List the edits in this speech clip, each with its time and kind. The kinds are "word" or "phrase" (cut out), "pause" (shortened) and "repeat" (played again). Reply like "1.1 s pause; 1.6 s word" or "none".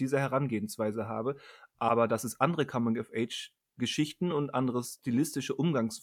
none